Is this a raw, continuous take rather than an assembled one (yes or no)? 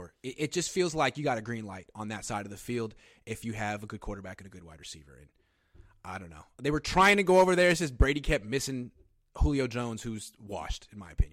yes